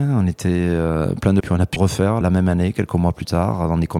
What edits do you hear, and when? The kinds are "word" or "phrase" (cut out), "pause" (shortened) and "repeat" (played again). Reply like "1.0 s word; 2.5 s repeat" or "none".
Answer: 1.4 s phrase; 1.8 s word; 2.2 s word